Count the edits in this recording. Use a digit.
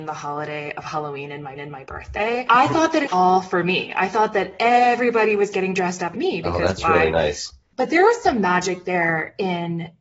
3